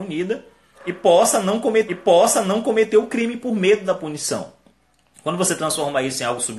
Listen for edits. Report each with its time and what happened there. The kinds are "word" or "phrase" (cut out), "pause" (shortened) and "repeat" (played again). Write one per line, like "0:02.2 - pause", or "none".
0:01.9 - repeat